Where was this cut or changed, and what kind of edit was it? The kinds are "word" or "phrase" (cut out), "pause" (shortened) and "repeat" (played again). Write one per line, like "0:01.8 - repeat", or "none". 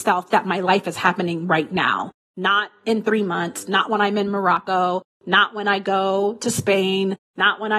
none

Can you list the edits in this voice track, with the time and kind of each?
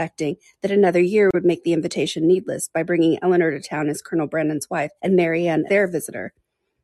0:05.0 - pause
0:05.7 - word

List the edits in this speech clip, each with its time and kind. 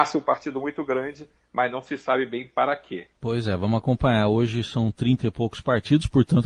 0:03.1 - pause

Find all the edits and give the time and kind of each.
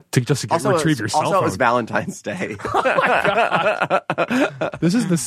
none

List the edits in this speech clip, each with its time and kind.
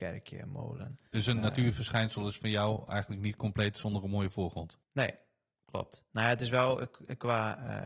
0:01.1 - pause
0:04.8 - pause

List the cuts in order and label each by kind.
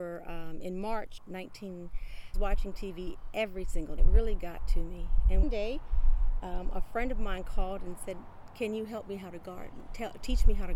0:01.2 - phrase
0:02.3 - phrase
0:04.0 - phrase
0:05.4 - word

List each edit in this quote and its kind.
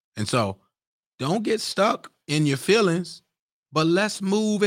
0:03.4 - pause

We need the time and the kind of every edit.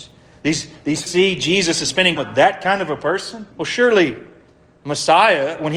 0:01.1 - word
0:02.2 - word
0:03.5 - pause

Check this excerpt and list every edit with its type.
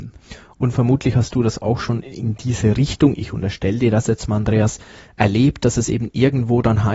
none

